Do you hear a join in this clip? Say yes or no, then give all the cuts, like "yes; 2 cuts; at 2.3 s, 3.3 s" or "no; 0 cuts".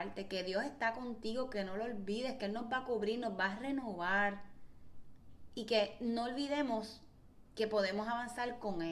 no; 0 cuts